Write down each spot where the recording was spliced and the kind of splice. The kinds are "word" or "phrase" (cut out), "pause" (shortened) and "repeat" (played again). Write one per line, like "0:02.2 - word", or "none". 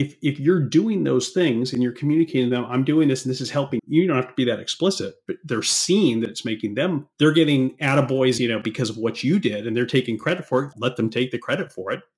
0:03.8 - word
0:07.1 - pause
0:08.4 - phrase
0:10.7 - word